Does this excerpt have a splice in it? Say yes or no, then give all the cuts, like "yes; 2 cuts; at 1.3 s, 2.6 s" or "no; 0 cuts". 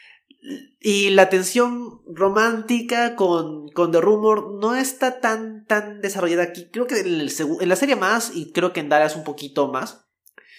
no; 0 cuts